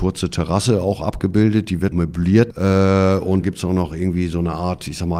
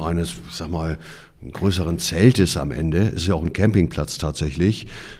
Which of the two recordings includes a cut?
first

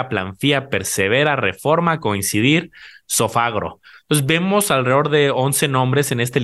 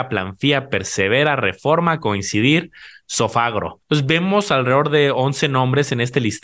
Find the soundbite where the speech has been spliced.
second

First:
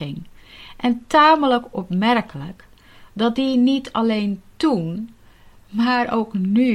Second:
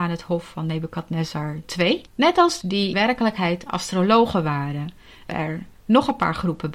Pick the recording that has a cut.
second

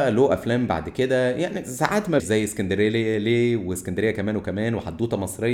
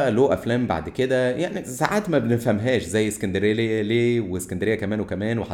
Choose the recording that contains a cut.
first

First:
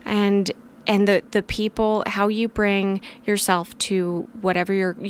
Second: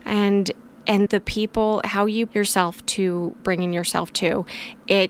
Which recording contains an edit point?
second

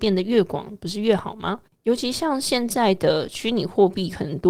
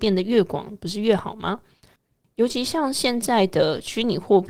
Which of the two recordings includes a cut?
first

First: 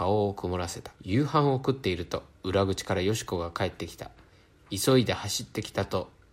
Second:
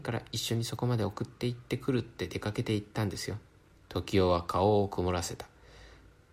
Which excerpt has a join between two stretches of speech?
first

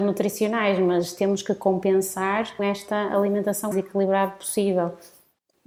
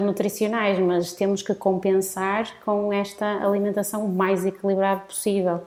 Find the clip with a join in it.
first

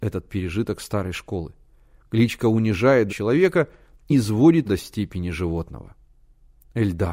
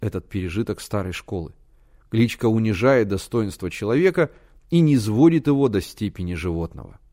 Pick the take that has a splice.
first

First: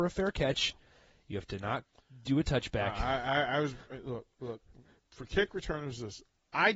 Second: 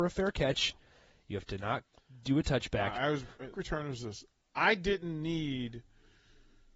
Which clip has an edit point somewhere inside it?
second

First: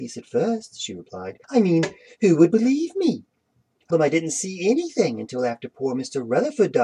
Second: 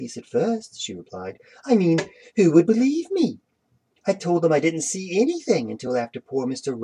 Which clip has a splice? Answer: first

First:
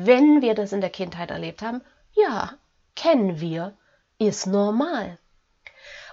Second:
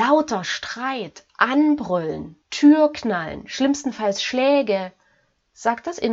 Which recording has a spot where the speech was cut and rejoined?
second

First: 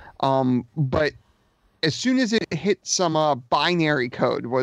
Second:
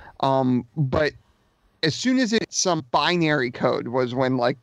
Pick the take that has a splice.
second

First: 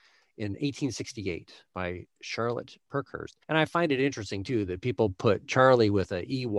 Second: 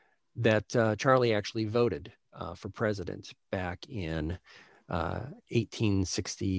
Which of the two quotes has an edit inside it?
first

